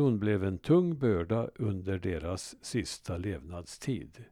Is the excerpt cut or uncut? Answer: uncut